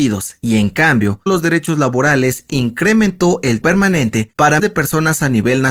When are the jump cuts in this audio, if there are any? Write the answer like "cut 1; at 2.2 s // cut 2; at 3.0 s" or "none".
cut 1; at 1.3 s // cut 2; at 2.5 s // cut 3; at 3.6 s // cut 4; at 4.6 s